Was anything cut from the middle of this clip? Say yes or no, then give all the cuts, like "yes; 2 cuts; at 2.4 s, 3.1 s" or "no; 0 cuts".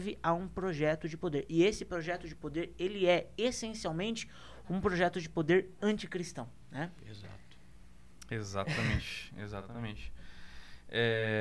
no; 0 cuts